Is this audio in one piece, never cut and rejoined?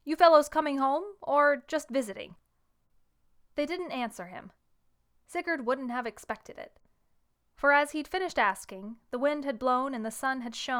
yes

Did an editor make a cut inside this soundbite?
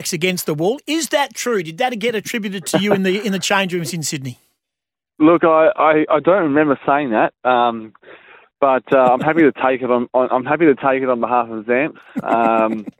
no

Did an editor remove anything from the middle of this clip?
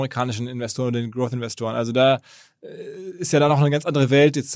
no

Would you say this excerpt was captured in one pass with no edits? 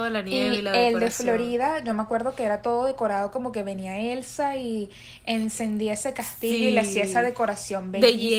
yes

